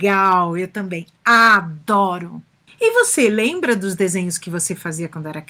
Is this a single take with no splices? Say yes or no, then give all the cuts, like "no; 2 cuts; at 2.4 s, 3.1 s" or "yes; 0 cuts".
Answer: yes; 0 cuts